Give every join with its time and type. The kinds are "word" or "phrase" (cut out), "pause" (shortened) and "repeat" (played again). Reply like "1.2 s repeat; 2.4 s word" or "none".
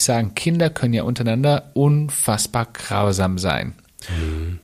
none